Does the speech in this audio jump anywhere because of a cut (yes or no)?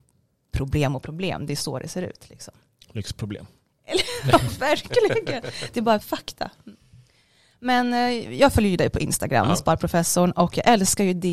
yes